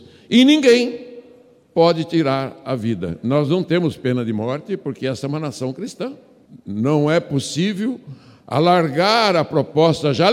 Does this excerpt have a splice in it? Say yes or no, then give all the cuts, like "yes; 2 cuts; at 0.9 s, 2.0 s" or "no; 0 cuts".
no; 0 cuts